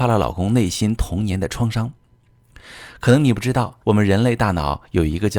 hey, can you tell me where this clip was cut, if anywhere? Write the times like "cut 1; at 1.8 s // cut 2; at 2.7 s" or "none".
cut 1; at 3.8 s

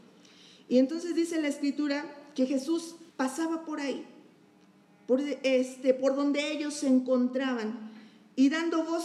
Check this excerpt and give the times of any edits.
cut 1; at 3.1 s

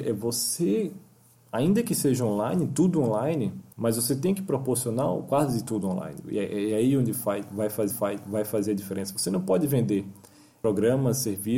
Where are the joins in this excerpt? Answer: cut 1; at 3.7 s // cut 2; at 7.9 s

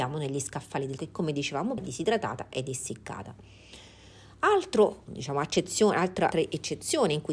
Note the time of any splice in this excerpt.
cut 1; at 1.0 s // cut 2; at 1.8 s // cut 3; at 5.0 s // cut 4; at 6.3 s

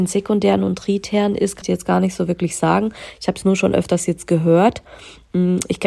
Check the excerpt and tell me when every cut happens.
cut 1; at 1.6 s

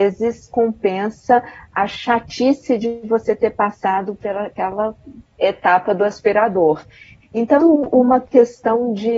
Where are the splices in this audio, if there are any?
cut 1; at 7.6 s

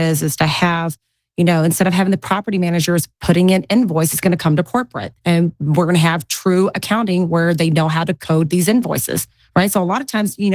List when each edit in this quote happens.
none

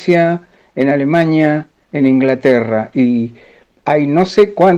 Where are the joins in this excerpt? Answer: none

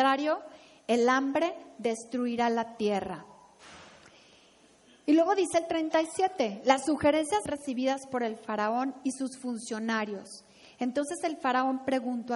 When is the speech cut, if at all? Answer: cut 1; at 7.5 s

